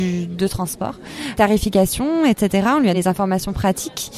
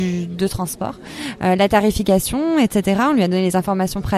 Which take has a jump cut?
first; 2 cuts; at 1.4 s, 2.9 s

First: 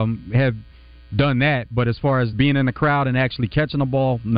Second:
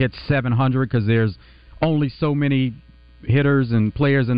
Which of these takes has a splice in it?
first; 1 cut; at 2.3 s

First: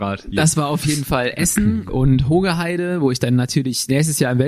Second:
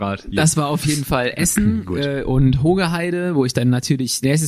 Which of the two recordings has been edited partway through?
first; 1 cut; at 1.9 s

